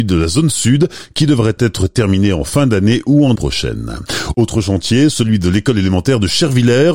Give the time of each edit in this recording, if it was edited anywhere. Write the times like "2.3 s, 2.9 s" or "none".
3.4 s